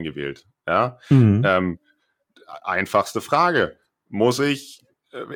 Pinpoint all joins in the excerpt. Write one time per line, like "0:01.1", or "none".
none